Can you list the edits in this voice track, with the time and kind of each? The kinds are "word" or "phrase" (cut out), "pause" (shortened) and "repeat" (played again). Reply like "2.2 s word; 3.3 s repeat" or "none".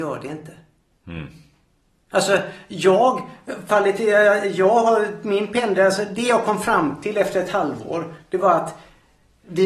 none